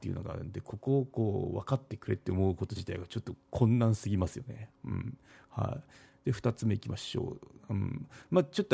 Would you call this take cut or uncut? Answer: uncut